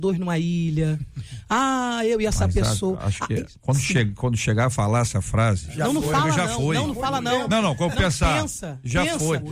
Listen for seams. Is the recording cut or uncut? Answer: uncut